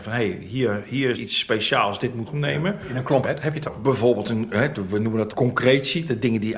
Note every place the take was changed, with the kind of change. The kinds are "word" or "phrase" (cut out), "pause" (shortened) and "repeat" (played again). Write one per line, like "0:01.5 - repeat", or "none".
0:01.1 - word
0:02.2 - word
0:03.2 - word
0:03.6 - word
0:05.3 - word